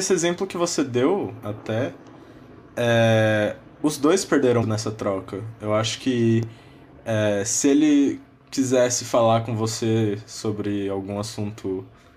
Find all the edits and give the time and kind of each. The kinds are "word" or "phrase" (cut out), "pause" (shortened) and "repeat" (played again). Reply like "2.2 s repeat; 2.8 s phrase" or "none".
4.6 s word